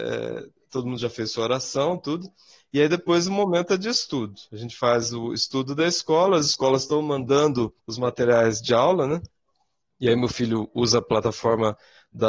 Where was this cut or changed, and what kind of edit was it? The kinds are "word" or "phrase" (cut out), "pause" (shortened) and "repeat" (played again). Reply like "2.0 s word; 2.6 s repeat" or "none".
7.8 s pause